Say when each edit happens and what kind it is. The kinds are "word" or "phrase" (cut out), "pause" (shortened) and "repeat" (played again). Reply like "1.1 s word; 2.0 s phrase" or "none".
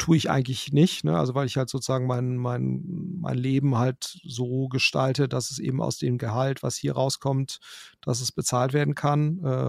none